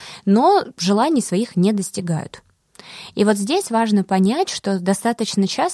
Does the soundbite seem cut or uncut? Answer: uncut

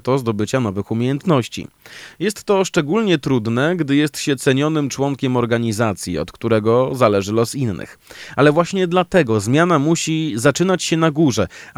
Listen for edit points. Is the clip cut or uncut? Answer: uncut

